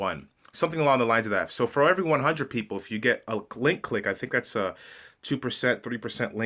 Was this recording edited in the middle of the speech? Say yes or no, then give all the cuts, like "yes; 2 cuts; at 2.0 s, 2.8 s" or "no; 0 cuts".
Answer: no; 0 cuts